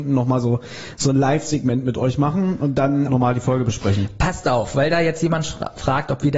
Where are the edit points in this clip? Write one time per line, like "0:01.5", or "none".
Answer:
0:03.1